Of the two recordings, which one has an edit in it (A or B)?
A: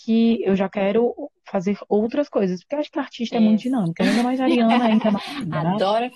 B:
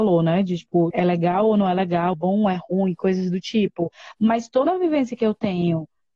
B